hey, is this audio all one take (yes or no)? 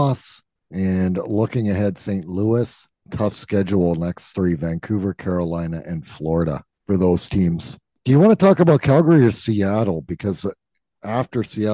yes